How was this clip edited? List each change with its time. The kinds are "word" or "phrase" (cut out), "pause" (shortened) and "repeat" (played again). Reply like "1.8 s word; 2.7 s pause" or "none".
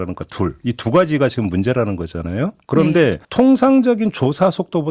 2.6 s pause; 3.2 s pause